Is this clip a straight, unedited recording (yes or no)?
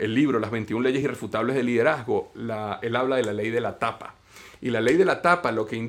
yes